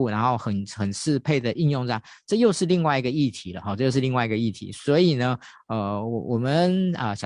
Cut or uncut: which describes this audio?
uncut